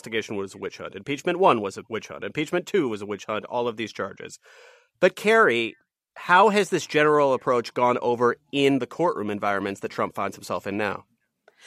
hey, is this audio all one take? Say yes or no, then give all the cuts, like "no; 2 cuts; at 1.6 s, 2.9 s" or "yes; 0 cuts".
yes; 0 cuts